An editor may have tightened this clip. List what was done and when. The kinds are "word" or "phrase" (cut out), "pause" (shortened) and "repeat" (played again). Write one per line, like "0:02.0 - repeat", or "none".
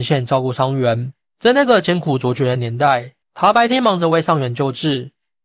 0:03.2 - pause